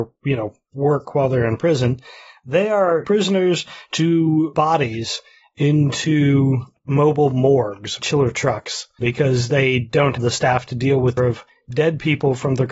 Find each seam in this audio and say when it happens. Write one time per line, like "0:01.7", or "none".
0:03.0
0:04.5
0:08.0
0:09.0
0:10.2
0:11.2